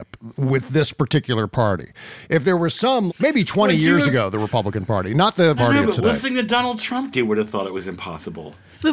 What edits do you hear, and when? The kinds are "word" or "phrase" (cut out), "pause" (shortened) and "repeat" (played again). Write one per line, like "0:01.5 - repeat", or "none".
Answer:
0:03.1 - word
0:05.6 - word
0:07.1 - word